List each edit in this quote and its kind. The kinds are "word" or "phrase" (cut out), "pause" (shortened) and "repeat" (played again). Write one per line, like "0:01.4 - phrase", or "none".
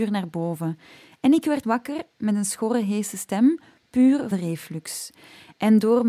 0:01.6 - word
0:04.3 - word